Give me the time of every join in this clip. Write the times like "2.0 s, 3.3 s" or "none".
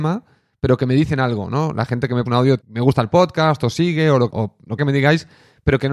2.3 s, 2.6 s, 4.3 s, 4.8 s